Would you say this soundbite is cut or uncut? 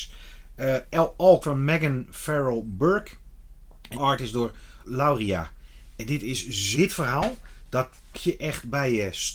cut